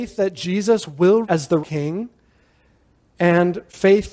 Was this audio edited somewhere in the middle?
yes; 2 cuts; at 1.2 s, 1.6 s

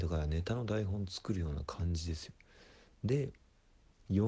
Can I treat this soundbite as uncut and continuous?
yes; 0 cuts

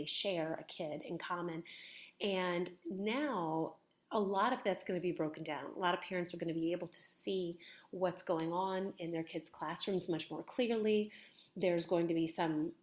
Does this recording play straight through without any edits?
yes; 0 cuts

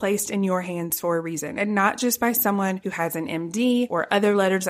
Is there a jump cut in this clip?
no; 0 cuts

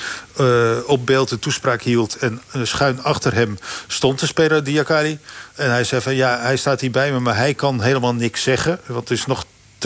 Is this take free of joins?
yes; 0 cuts

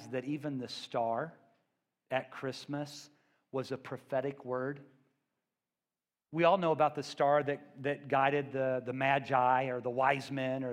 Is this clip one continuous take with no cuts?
yes; 0 cuts

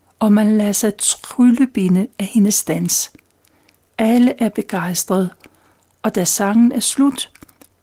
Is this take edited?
no; 0 cuts

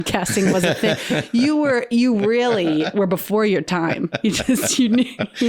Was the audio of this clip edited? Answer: no; 0 cuts

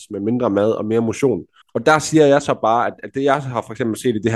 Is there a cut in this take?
yes; 1 cut; at 1.6 s

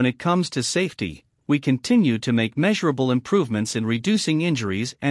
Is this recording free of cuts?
yes; 0 cuts

